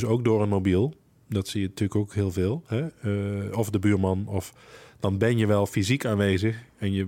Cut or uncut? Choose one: uncut